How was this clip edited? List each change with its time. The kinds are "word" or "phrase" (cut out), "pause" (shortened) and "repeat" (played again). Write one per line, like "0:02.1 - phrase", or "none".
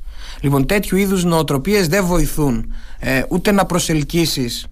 none